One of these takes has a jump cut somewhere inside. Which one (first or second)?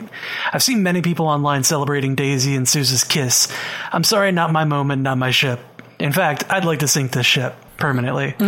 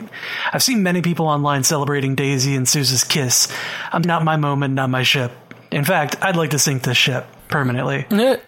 second